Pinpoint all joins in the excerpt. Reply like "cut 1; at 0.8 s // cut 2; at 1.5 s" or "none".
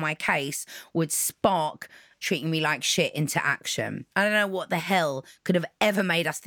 cut 1; at 2.2 s // cut 2; at 4.1 s